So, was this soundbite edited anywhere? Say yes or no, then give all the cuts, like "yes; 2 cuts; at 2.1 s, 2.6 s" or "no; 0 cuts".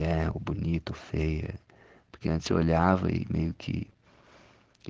no; 0 cuts